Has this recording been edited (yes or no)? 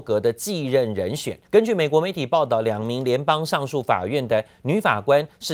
yes